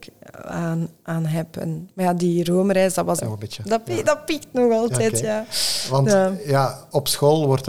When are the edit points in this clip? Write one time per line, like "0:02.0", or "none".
0:03.2